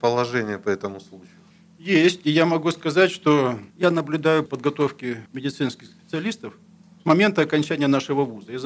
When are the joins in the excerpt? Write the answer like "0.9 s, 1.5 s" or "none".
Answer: 1.5 s, 3.7 s, 4.5 s, 5.3 s, 7.0 s